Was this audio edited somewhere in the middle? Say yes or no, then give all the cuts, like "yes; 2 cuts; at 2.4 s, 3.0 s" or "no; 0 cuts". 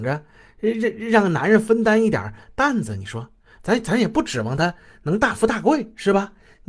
no; 0 cuts